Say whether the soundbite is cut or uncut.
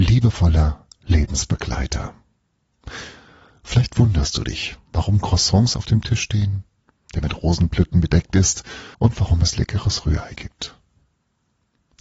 cut